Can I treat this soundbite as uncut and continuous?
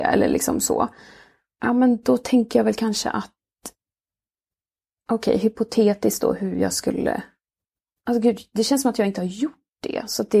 yes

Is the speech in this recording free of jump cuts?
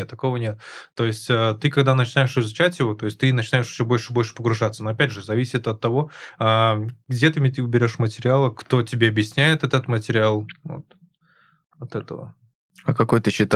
yes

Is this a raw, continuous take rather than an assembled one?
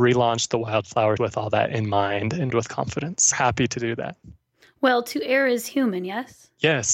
no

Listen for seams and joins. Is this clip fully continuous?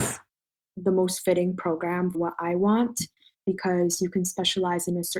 no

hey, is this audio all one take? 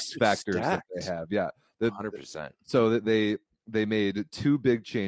yes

